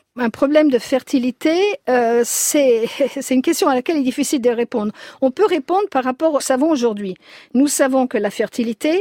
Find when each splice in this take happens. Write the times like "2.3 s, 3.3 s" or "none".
6.4 s